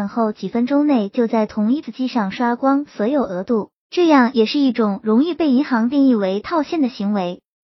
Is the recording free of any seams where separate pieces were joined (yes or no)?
no